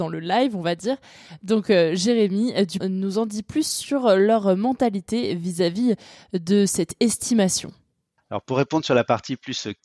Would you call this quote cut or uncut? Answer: cut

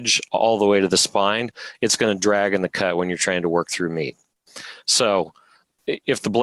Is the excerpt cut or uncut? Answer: uncut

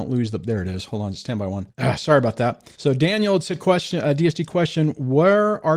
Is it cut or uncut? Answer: cut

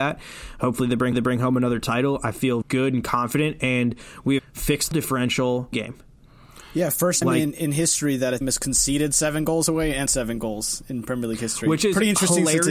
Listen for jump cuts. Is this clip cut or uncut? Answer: cut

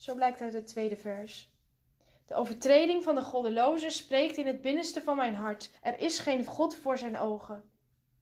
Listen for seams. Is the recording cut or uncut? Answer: cut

